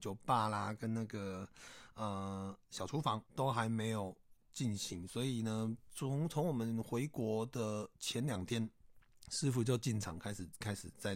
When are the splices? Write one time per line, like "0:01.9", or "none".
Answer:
0:03.3
0:07.9

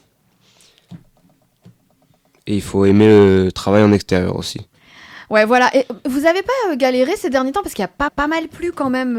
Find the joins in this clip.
0:08.1

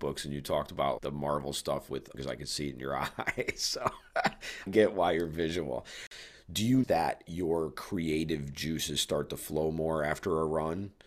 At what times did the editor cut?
0:01.0
0:02.1
0:04.7
0:06.8

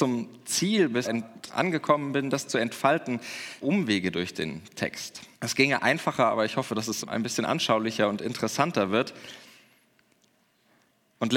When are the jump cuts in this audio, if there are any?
0:01.0
0:01.5
0:03.6
0:05.3
0:07.0

